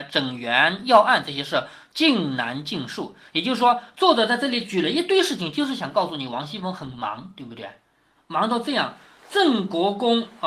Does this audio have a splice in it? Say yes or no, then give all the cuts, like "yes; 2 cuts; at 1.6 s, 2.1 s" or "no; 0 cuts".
no; 0 cuts